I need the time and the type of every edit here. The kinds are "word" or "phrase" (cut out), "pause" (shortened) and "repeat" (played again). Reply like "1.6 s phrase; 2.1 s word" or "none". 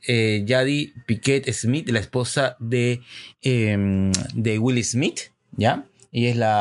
none